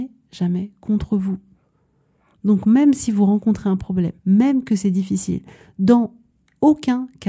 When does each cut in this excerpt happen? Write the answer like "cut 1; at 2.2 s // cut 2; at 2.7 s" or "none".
cut 1; at 4.2 s